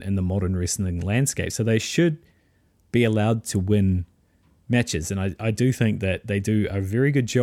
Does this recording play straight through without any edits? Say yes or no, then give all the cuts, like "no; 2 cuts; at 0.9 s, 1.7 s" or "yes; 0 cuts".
yes; 0 cuts